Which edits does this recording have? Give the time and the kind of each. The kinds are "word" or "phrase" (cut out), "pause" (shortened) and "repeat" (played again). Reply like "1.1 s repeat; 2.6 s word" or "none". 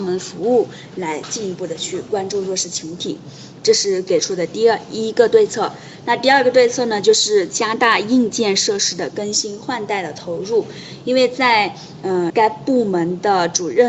12.3 s word